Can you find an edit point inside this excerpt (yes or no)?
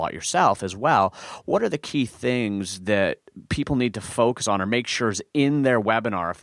no